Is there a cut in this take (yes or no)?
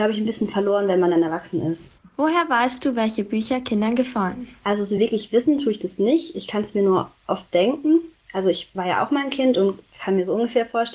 no